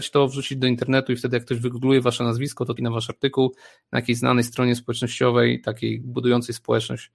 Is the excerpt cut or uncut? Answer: cut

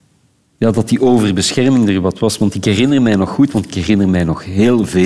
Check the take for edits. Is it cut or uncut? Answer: uncut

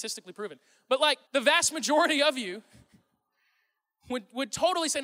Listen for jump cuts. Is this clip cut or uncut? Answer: cut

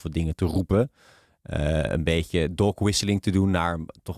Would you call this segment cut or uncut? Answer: uncut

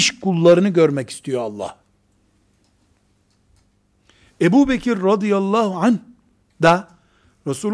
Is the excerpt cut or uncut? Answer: uncut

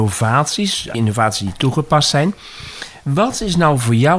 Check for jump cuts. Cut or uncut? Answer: cut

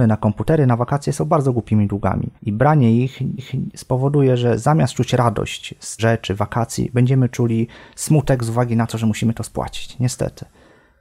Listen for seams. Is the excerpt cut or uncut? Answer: cut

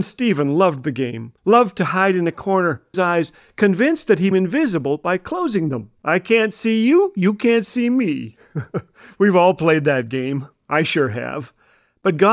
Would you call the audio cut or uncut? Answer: cut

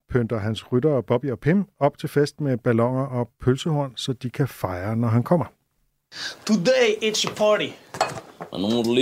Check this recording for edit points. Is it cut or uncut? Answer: uncut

